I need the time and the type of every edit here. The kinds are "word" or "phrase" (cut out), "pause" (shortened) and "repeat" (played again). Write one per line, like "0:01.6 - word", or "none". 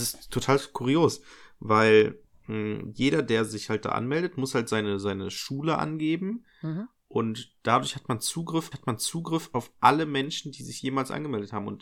0:02.3 - pause
0:08.7 - repeat